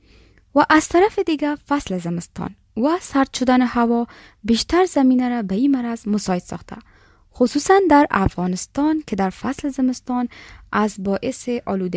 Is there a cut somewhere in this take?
no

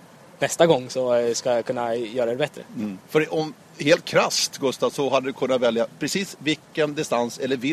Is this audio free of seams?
no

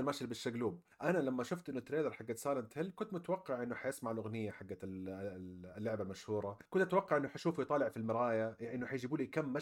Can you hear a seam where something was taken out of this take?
yes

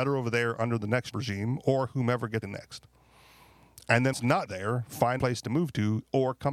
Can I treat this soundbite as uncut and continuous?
no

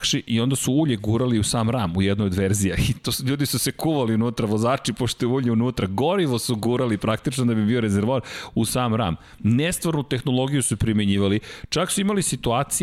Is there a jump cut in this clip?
no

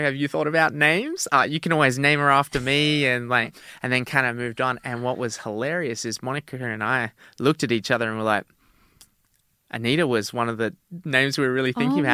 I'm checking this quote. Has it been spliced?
no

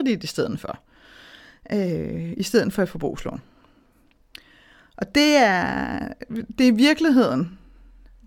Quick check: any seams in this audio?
no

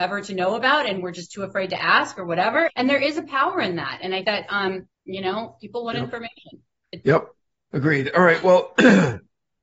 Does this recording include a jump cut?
yes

